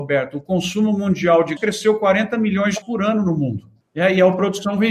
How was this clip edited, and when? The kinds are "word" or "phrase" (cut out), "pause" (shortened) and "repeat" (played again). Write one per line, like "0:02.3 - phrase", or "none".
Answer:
0:01.6 - word
0:02.8 - word
0:03.8 - pause

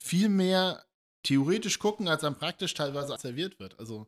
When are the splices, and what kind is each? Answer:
0:03.2 - word

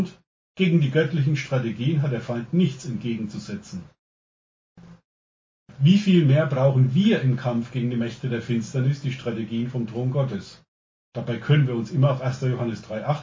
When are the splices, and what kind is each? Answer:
none

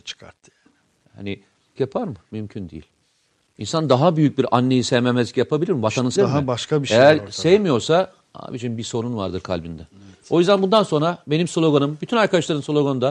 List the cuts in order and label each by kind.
0:01.8 - phrase
0:06.2 - phrase

